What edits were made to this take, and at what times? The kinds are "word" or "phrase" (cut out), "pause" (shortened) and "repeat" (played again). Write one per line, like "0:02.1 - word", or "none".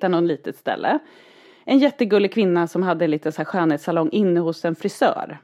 none